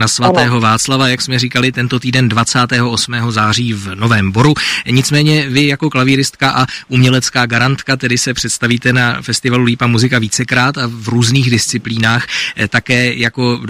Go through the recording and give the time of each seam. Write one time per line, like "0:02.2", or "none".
none